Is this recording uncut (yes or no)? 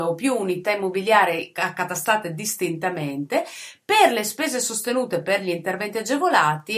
yes